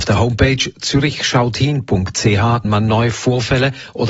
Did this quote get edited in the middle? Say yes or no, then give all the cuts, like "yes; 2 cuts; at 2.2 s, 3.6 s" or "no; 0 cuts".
yes; 1 cut; at 2.6 s